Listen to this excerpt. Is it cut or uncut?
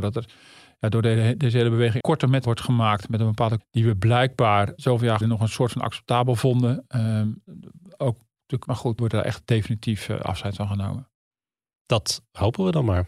cut